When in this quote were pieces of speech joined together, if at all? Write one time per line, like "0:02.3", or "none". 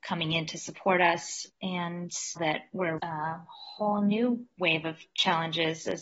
0:02.4
0:03.0